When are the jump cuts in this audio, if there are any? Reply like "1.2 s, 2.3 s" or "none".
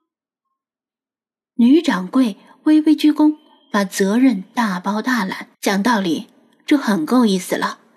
5.5 s